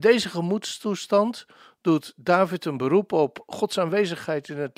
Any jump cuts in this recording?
no; 0 cuts

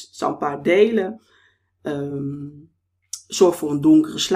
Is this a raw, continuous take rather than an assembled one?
yes; 0 cuts

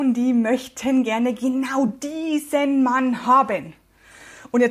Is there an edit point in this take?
no; 0 cuts

